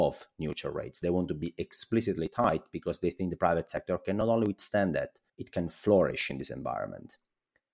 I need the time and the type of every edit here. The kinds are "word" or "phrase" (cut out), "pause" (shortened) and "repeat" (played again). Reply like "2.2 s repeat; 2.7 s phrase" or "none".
5.3 s pause